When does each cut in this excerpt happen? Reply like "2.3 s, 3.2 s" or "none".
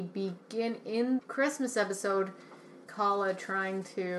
1.2 s, 2.9 s